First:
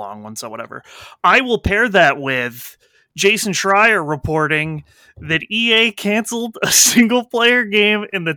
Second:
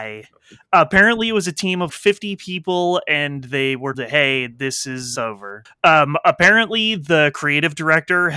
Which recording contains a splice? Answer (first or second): second